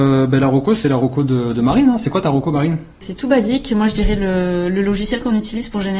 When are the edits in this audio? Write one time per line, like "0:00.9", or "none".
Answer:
0:02.9